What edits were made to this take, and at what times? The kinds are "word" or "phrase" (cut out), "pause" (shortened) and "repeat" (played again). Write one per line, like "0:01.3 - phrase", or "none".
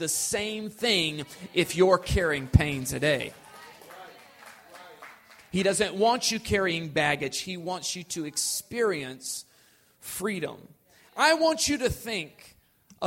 none